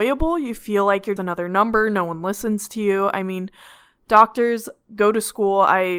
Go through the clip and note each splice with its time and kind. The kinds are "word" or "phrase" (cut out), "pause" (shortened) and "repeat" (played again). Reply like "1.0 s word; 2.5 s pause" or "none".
1.2 s word